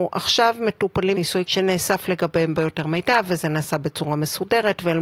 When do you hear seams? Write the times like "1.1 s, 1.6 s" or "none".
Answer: 1.1 s, 1.4 s, 2.5 s